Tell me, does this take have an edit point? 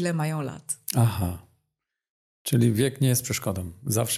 no; 0 cuts

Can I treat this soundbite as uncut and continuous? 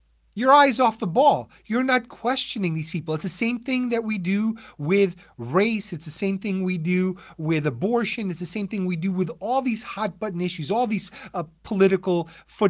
yes; 0 cuts

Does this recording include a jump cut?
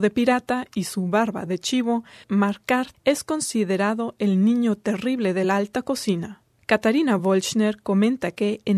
no; 0 cuts

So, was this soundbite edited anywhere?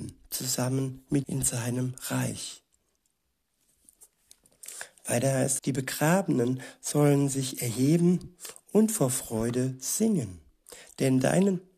yes; 2 cuts; at 1.2 s, 5.6 s

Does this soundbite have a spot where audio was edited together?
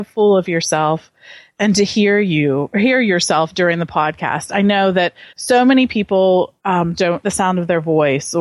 yes; 3 cuts; at 5.3 s, 6.6 s, 7.2 s

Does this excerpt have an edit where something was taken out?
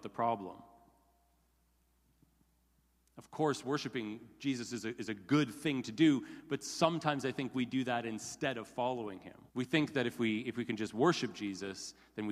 yes; 1 cut; at 9.5 s

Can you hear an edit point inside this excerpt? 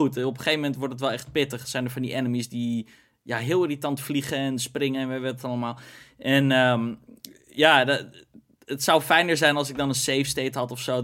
no; 0 cuts

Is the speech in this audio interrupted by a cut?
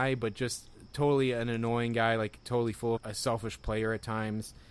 yes; 1 cut; at 3.0 s

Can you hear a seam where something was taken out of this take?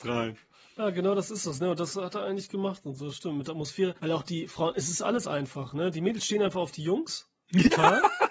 yes; 1 cut; at 4.0 s

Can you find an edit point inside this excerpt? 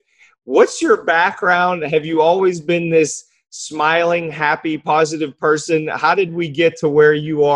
no; 0 cuts

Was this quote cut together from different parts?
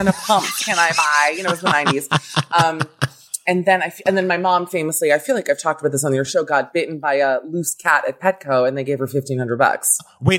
no; 0 cuts

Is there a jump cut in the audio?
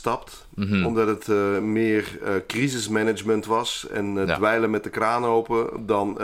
no; 0 cuts

